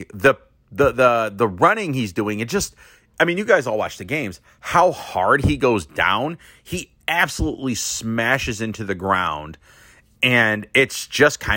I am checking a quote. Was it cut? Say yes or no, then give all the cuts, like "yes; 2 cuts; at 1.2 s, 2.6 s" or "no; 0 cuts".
no; 0 cuts